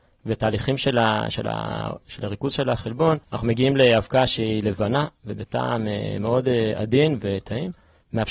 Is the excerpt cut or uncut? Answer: cut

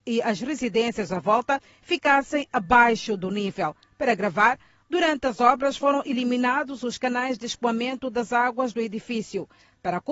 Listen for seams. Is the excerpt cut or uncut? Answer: uncut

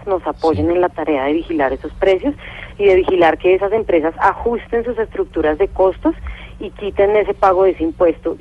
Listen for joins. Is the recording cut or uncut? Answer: uncut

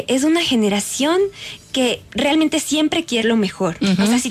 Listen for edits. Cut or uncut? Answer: cut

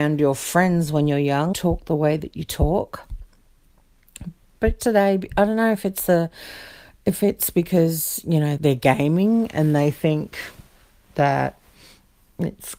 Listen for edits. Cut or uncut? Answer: cut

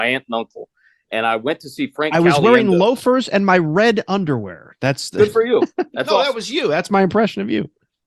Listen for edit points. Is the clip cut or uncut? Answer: uncut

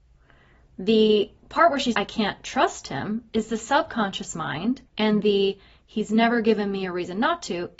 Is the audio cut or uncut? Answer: cut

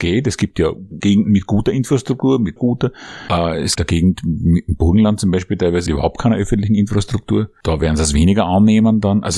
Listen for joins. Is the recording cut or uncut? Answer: cut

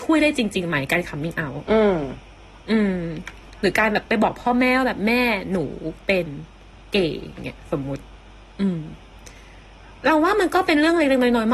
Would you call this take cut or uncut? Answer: uncut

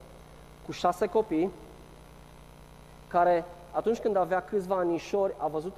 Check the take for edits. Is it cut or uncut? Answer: uncut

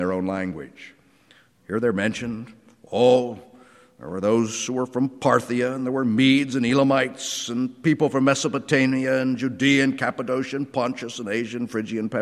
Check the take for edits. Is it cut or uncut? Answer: uncut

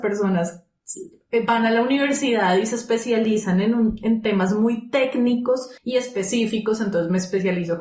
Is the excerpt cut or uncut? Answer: cut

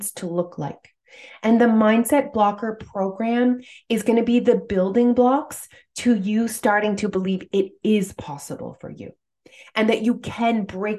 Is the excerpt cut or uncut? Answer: uncut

